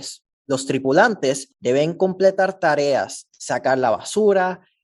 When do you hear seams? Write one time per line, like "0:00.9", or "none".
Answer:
0:03.4